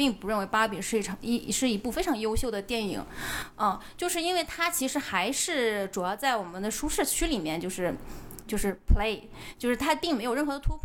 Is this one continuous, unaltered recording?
yes; 0 cuts

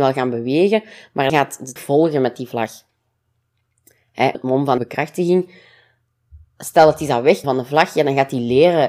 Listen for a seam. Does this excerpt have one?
yes; 5 cuts; at 1.3 s, 1.8 s, 4.3 s, 4.8 s, 7.4 s

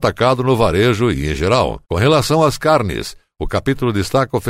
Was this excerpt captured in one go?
yes; 0 cuts

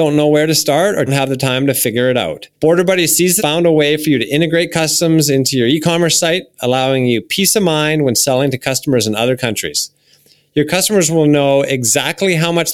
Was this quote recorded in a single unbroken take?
no; 3 cuts; at 1.1 s, 2.5 s, 3.4 s

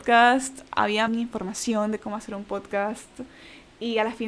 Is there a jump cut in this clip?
yes; 1 cut; at 1.1 s

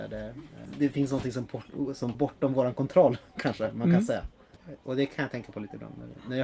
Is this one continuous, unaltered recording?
no; 1 cut; at 2.1 s

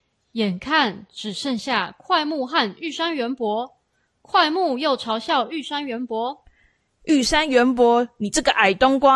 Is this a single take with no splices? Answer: yes; 0 cuts

